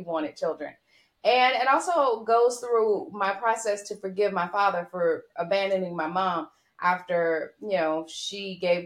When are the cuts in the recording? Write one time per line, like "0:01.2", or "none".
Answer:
none